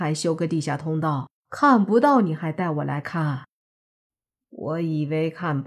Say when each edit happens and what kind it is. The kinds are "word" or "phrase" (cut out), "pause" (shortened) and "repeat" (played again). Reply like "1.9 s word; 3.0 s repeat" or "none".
1.4 s pause; 4.1 s pause